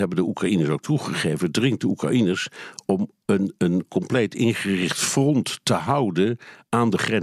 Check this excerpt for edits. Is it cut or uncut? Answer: uncut